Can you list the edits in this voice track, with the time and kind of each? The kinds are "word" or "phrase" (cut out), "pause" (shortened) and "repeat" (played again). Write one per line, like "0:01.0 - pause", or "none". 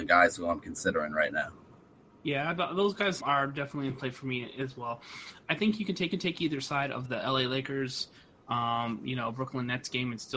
0:03.2 - word
0:06.1 - repeat
0:07.0 - word